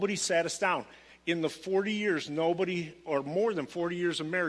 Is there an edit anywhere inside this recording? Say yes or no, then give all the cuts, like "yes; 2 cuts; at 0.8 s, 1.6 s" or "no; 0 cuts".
no; 0 cuts